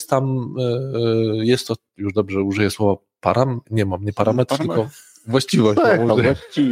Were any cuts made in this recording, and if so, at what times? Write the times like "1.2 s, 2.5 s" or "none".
3.6 s